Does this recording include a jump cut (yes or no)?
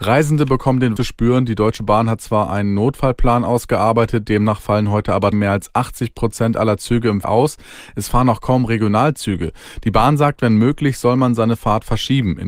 yes